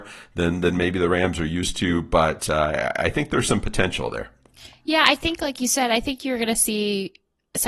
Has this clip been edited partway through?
no; 0 cuts

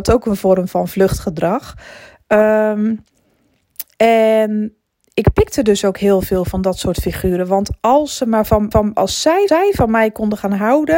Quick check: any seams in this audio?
yes; 2 cuts; at 8.7 s, 9.5 s

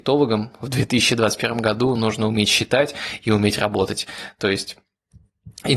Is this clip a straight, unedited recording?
yes; 0 cuts

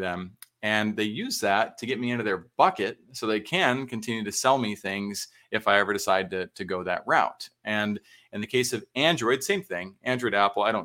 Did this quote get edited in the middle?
no; 0 cuts

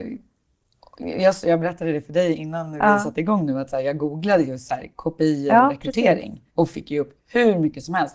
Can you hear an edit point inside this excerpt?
yes; 1 cut; at 6.5 s

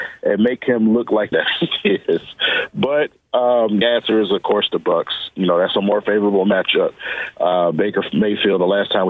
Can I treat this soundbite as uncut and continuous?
no; 2 cuts; at 1.3 s, 3.8 s

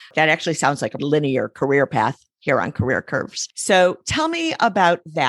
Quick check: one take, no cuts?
no; 1 cut; at 1.0 s

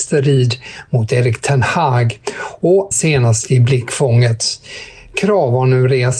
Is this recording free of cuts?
no; 1 cut; at 2.9 s

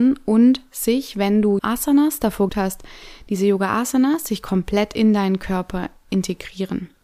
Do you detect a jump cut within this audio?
yes; 2 cuts; at 1.6 s, 2.5 s

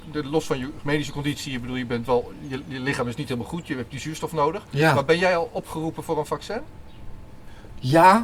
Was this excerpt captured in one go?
yes; 0 cuts

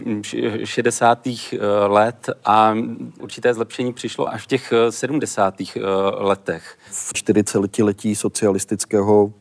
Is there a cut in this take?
yes; 3 cuts; at 3.2 s, 4.3 s, 7.1 s

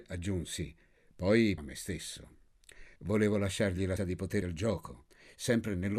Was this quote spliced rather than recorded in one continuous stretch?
yes; 4 cuts; at 1.6 s, 3.0 s, 4.0 s, 4.4 s

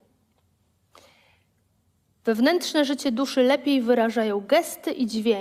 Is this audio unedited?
yes; 0 cuts

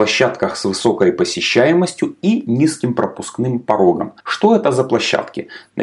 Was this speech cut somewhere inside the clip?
yes; 1 cut; at 4.2 s

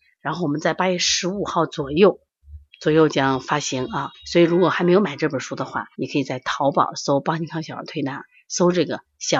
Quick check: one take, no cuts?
no; 3 cuts; at 2.7 s, 4.1 s, 5.9 s

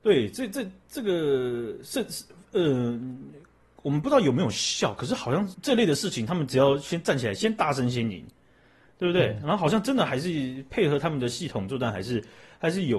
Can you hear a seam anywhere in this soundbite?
yes; 1 cut; at 5.5 s

